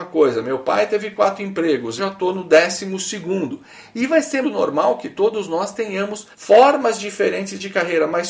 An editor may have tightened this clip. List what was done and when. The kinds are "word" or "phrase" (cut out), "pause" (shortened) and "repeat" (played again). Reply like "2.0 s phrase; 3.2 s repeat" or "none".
2.0 s word; 4.4 s word; 6.3 s pause